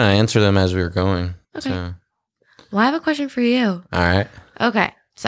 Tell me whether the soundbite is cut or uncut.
cut